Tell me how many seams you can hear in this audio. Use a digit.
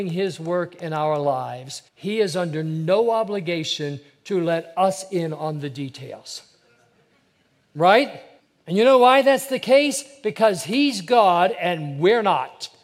2